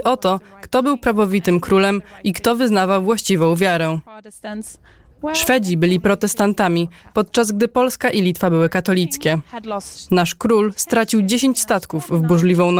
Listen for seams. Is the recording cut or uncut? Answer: uncut